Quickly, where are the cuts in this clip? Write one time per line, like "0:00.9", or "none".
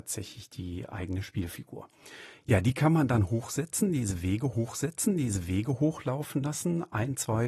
0:04.5